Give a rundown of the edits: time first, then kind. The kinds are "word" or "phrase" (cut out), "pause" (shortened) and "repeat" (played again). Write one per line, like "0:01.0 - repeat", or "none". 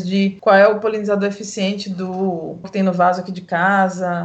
0:02.6 - word